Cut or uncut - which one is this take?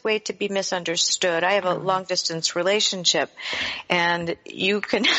uncut